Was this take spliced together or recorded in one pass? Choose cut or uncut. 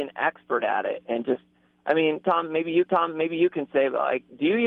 cut